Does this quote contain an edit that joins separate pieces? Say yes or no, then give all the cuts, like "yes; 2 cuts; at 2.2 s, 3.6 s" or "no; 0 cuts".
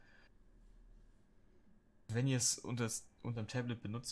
no; 0 cuts